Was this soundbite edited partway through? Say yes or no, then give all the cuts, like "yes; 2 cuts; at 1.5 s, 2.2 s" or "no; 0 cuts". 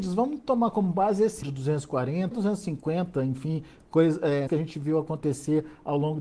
yes; 3 cuts; at 1.4 s, 2.3 s, 4.5 s